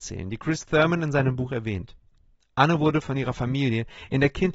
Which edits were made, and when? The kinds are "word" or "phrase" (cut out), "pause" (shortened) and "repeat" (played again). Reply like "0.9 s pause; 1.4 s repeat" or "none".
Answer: none